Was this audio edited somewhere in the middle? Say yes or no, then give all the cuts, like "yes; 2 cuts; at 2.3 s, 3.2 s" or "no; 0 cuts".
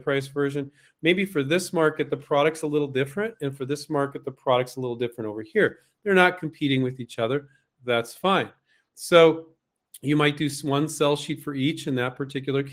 no; 0 cuts